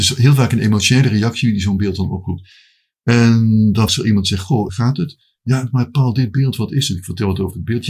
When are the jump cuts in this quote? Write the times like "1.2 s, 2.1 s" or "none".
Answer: 3.9 s, 4.7 s